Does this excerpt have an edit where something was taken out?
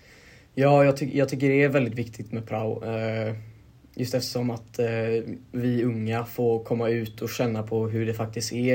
no; 0 cuts

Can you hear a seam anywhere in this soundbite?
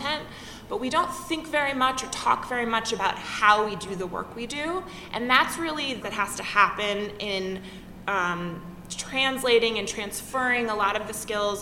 yes; 1 cut; at 6.0 s

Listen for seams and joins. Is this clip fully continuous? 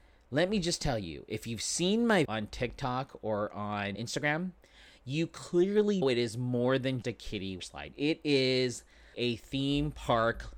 no; 6 cuts; at 2.2 s, 3.9 s, 6.0 s, 7.0 s, 7.6 s, 9.1 s

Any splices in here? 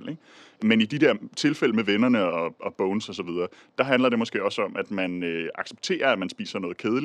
no; 0 cuts

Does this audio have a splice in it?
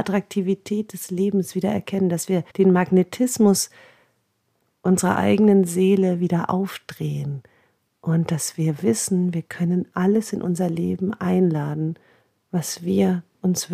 yes; 1 cut; at 2.5 s

